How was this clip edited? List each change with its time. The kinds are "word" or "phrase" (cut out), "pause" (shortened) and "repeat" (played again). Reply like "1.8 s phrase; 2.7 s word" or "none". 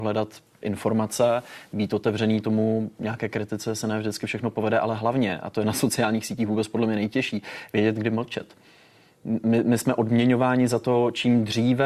none